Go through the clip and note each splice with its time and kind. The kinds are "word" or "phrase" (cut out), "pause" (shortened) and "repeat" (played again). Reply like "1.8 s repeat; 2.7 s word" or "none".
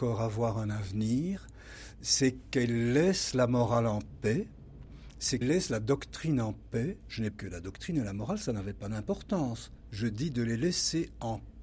5.4 s word; 7.3 s phrase